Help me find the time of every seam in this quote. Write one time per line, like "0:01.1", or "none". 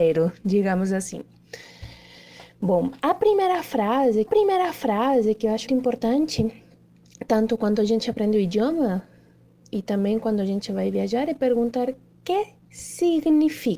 0:04.3
0:05.7